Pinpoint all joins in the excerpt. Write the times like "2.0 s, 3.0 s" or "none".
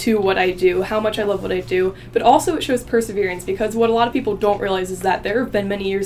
none